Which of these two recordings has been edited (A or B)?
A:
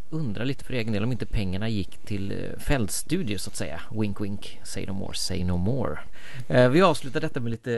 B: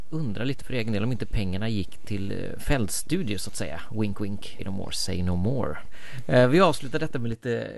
B